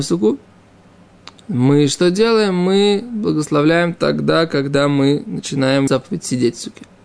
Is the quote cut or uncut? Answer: cut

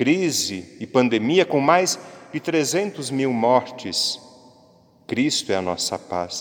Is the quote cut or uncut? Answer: uncut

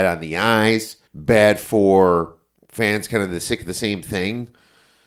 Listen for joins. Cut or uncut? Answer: cut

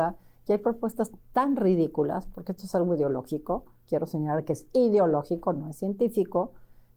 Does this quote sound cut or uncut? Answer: uncut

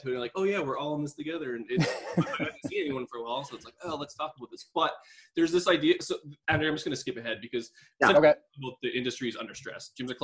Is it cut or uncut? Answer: uncut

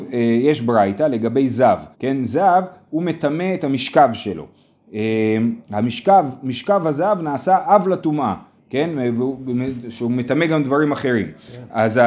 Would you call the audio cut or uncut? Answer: cut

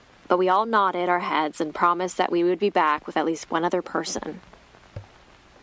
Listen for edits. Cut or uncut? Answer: uncut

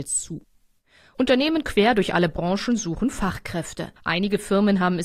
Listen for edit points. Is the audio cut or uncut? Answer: cut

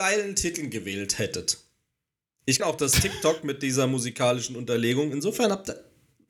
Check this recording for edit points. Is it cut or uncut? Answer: cut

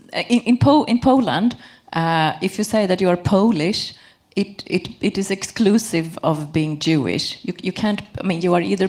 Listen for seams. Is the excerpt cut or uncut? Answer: uncut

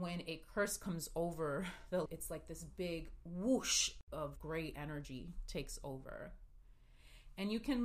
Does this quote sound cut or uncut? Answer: cut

